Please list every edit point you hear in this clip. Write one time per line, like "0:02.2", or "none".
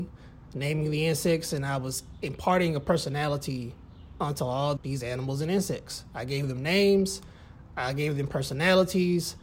0:04.8